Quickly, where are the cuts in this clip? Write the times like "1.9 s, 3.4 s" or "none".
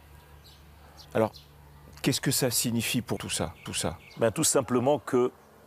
1.0 s, 3.2 s, 3.7 s